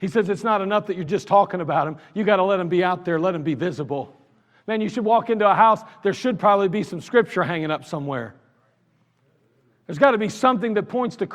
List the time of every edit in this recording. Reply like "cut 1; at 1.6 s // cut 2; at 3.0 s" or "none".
none